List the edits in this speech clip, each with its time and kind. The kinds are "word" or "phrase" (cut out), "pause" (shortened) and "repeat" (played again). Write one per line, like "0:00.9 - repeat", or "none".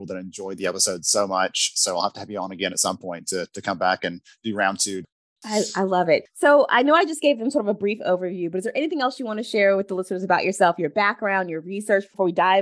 none